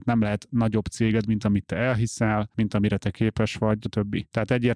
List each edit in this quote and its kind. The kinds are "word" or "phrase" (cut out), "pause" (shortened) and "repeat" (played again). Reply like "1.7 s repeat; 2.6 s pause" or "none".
3.8 s word